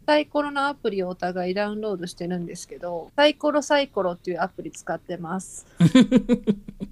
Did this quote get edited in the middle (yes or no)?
yes